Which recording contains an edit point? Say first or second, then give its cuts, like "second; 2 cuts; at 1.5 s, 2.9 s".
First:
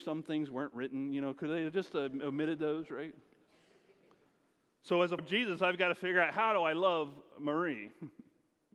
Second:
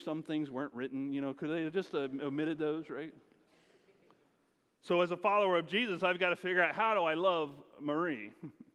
first; 1 cut; at 5.2 s